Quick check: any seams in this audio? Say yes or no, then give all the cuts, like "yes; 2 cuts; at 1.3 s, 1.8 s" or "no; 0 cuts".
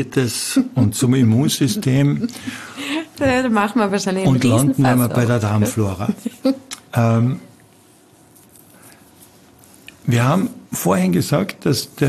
yes; 1 cut; at 10.7 s